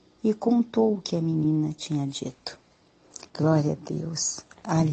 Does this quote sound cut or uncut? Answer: cut